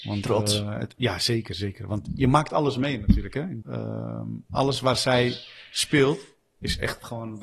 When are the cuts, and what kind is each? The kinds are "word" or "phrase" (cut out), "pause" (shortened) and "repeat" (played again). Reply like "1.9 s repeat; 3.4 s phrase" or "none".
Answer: 3.6 s word